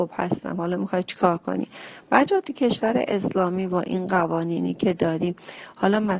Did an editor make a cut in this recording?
no; 0 cuts

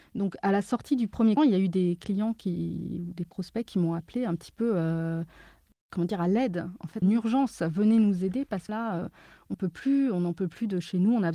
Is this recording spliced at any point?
yes; 4 cuts; at 1.4 s, 7.0 s, 8.7 s, 9.5 s

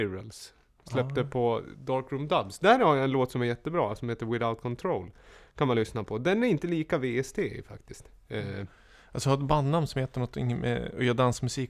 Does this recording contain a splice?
no; 0 cuts

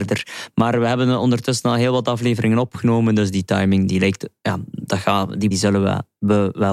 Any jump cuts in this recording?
yes; 1 cut; at 5.5 s

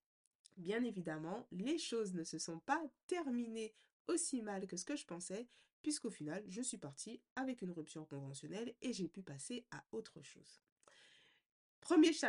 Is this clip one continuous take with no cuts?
yes; 0 cuts

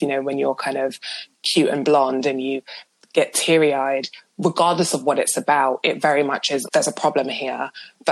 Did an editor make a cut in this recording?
yes; 1 cut; at 6.7 s

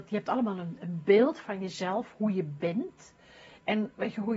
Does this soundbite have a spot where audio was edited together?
no; 0 cuts

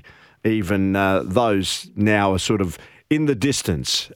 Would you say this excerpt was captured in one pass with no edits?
yes; 0 cuts

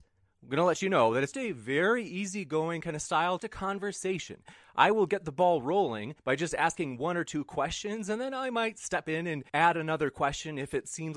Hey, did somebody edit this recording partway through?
yes; 4 cuts; at 1.3 s, 3.4 s, 6.2 s, 9.5 s

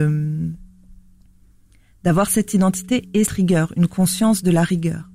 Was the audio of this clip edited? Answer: yes; 1 cut; at 3.3 s

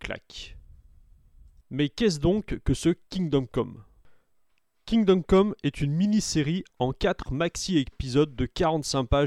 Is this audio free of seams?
yes; 0 cuts

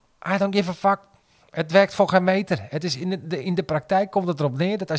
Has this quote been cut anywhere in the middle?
no; 0 cuts

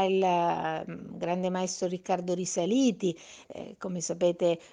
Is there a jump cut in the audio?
no; 0 cuts

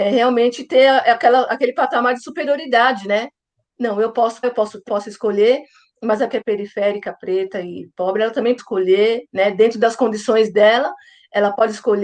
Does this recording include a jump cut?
yes; 4 cuts; at 4.4 s, 4.9 s, 6.3 s, 8.6 s

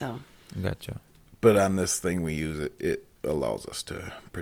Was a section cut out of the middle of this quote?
no; 0 cuts

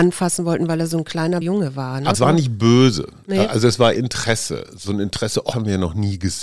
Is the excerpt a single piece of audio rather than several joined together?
no; 5 cuts; at 1.4 s, 2.1 s, 4.0 s, 4.8 s, 5.5 s

